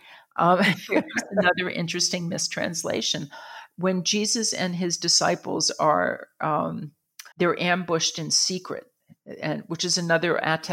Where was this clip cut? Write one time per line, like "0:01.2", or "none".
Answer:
0:07.3